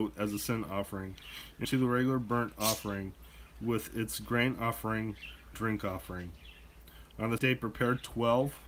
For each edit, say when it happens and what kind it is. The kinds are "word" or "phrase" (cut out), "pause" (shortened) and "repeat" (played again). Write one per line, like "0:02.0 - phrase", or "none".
0:01.6 - word
0:05.5 - word
0:07.4 - word

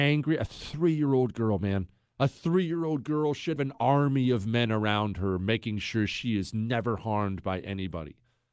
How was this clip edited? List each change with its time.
0:03.6 - word

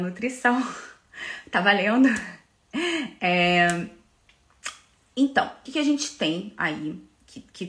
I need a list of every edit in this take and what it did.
0:05.7 - word

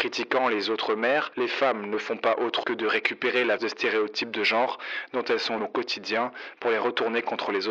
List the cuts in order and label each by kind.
0:02.6 - word
0:03.6 - word
0:05.6 - word

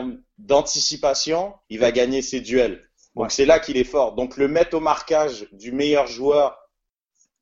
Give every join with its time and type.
0:01.6 - pause

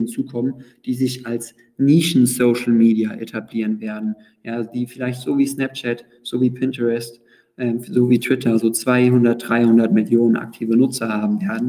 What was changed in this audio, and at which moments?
none

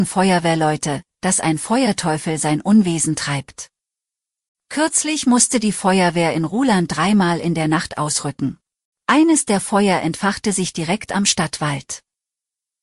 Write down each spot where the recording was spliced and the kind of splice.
0:08.8 - pause

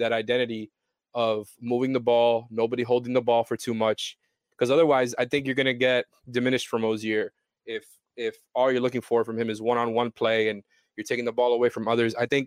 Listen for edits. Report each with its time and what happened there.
0:06.7 - word

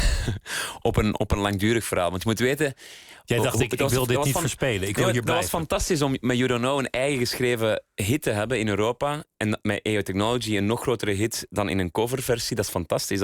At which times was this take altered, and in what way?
none

